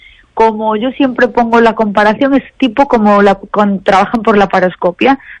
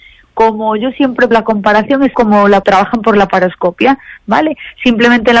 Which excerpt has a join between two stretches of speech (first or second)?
second